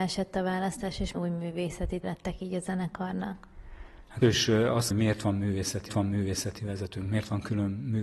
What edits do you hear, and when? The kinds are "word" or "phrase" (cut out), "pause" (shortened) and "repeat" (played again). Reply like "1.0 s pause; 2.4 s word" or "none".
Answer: 1.1 s word; 2.0 s word; 4.2 s word; 4.9 s phrase; 5.9 s repeat